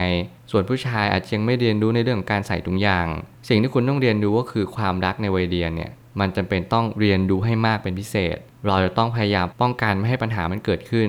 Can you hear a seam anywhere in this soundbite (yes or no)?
no